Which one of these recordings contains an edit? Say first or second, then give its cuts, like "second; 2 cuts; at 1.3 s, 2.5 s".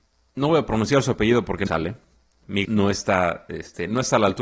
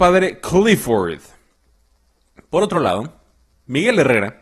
first; 2 cuts; at 1.7 s, 2.6 s